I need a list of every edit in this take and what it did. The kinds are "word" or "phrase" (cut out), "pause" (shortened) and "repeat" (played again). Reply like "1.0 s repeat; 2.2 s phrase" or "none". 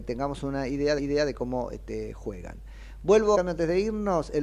1.0 s repeat; 3.3 s phrase